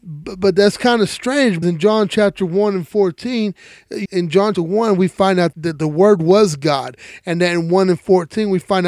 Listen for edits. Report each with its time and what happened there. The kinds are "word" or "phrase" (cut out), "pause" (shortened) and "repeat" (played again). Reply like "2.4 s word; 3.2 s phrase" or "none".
1.6 s word; 4.1 s word; 4.5 s word; 5.5 s word